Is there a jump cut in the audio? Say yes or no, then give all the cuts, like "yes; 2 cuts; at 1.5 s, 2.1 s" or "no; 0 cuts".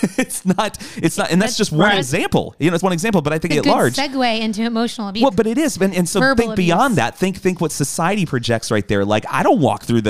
yes; 3 cuts; at 2.8 s, 3.5 s, 5.3 s